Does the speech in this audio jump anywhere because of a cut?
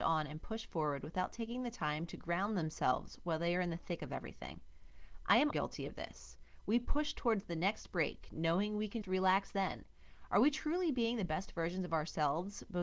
yes; 2 cuts; at 5.5 s, 9.0 s

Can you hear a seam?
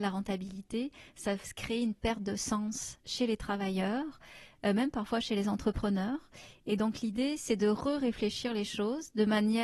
no; 0 cuts

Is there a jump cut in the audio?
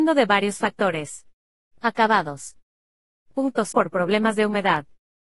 yes; 1 cut; at 3.7 s

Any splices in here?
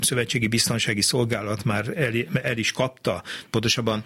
no; 0 cuts

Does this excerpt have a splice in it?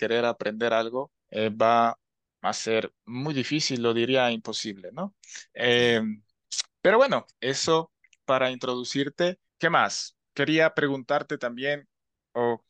yes; 6 cuts; at 1.2 s, 3.0 s, 5.5 s, 7.3 s, 9.5 s, 10.2 s

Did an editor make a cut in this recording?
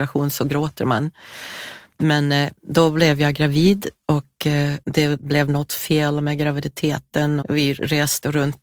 yes; 3 cuts; at 2.6 s, 4.8 s, 7.4 s

